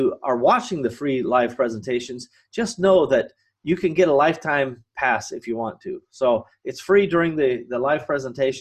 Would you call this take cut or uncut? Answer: uncut